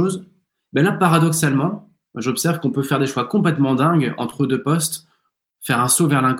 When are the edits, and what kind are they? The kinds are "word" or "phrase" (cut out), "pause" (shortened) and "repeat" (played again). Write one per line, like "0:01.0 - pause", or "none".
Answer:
none